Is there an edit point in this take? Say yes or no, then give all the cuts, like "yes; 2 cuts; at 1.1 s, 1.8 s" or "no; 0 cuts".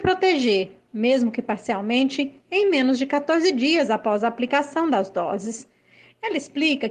no; 0 cuts